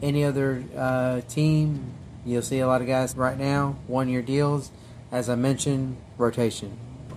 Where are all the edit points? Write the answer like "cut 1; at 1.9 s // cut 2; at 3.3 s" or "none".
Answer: cut 1; at 3.1 s